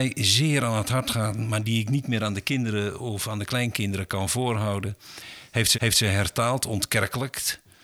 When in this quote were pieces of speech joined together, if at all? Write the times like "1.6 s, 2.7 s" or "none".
5.7 s